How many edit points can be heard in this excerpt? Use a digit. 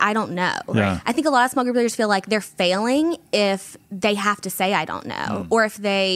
0